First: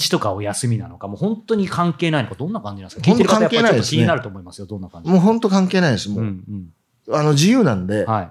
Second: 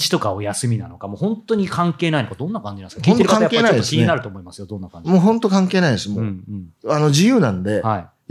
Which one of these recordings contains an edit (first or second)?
second